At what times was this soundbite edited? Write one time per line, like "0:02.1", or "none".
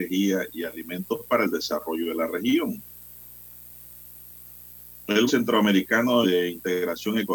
0:05.3
0:06.2